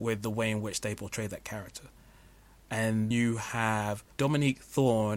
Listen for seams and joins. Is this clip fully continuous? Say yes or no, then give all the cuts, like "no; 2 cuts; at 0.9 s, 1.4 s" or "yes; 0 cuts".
no; 2 cuts; at 3.1 s, 4.1 s